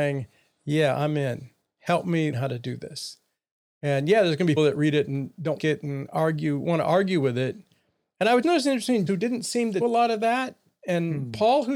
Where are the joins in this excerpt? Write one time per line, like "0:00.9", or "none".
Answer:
0:02.3
0:04.6
0:05.6
0:08.4
0:09.1
0:09.8